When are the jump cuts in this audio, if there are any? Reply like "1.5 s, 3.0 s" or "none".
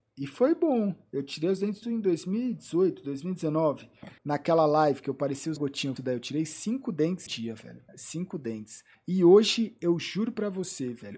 1.8 s, 4.2 s, 5.6 s, 6.0 s, 7.3 s, 7.9 s, 8.9 s